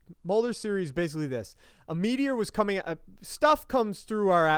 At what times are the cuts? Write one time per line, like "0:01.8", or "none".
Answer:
none